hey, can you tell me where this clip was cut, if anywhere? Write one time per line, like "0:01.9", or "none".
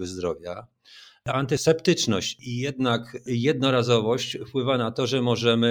0:01.3

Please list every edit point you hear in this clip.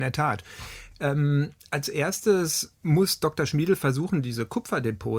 0:02.8

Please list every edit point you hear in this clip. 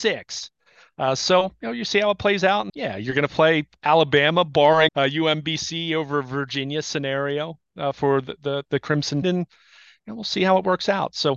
0:02.7
0:04.9
0:07.9
0:09.2

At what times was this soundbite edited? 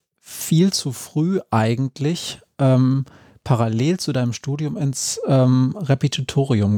none

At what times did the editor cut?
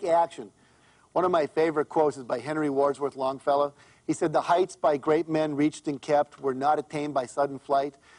none

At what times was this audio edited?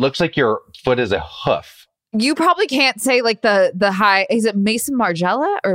none

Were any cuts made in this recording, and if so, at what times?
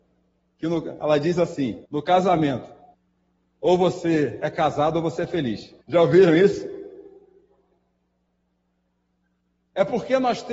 0:01.9
0:02.9
0:05.8

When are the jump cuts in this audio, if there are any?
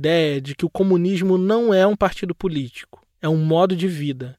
0:03.1

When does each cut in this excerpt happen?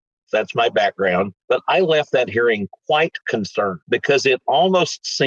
0:01.4
0:03.8

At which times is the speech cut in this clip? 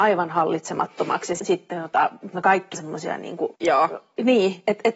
0:01.4
0:02.3
0:02.7
0:03.5

